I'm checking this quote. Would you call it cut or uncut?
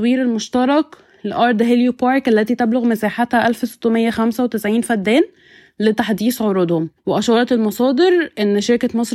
cut